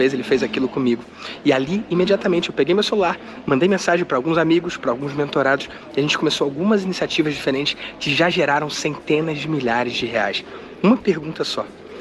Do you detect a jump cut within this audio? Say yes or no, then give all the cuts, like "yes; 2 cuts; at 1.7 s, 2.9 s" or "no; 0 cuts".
no; 0 cuts